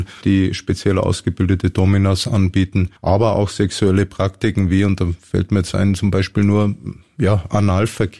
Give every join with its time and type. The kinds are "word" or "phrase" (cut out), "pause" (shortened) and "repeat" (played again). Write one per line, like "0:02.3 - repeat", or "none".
0:03.0 - pause